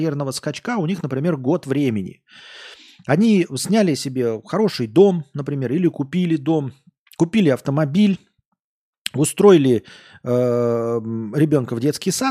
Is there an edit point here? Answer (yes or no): no